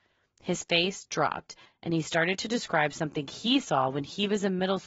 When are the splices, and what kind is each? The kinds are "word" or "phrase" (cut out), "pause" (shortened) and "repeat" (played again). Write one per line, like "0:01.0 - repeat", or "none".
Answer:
none